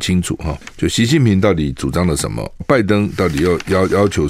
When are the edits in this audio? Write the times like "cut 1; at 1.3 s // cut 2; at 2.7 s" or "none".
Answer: cut 1; at 2.6 s